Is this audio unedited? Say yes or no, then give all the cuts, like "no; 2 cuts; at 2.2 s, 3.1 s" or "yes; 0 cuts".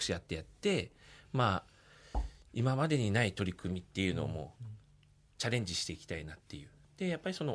yes; 0 cuts